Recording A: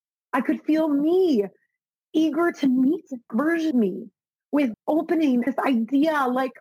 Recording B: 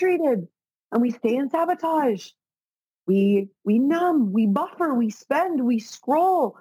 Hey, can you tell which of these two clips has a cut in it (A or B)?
A